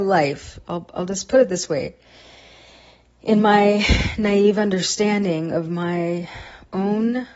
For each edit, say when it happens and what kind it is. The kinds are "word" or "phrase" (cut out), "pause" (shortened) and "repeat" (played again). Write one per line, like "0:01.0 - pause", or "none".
none